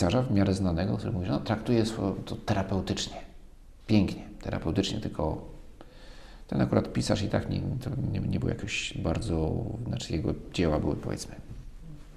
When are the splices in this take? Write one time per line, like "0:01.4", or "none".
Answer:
0:03.8